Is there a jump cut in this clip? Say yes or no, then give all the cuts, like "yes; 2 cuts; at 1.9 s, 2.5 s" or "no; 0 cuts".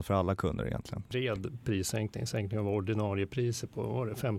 no; 0 cuts